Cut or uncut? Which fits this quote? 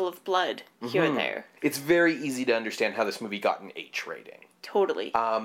cut